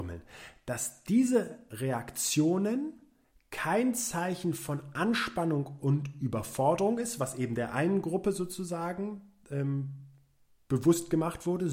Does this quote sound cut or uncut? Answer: uncut